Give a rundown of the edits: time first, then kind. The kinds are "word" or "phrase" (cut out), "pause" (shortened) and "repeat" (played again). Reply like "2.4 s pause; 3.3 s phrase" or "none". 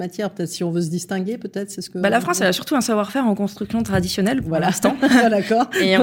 none